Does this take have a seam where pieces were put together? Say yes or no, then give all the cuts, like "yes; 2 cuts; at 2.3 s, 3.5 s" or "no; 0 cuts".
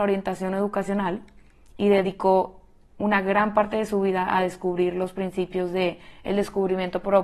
no; 0 cuts